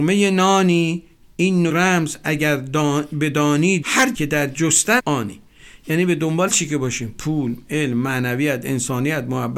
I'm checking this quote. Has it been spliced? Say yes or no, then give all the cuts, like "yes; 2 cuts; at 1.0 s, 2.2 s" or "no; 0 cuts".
yes; 6 cuts; at 1.2 s, 1.7 s, 3.8 s, 4.1 s, 5.0 s, 6.5 s